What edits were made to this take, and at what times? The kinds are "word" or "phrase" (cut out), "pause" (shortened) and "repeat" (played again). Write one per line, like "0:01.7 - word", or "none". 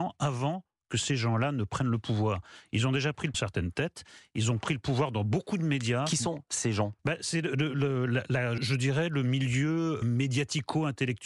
0:03.3 - phrase
0:07.0 - pause
0:08.6 - word
0:10.0 - word